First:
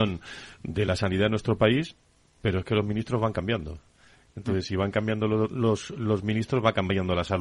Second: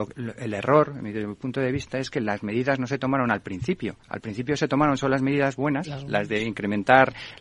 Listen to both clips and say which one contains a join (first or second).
second